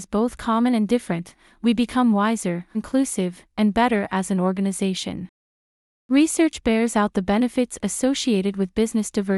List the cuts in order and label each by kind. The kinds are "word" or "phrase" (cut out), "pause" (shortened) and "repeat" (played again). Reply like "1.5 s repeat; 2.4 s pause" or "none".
2.7 s word